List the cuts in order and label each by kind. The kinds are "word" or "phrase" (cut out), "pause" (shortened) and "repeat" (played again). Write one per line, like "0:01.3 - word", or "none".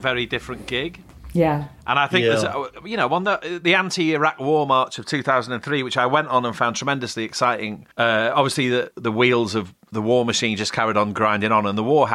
0:07.9 - pause
0:08.9 - word